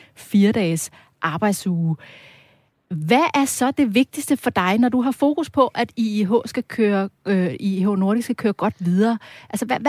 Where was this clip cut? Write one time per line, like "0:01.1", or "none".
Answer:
none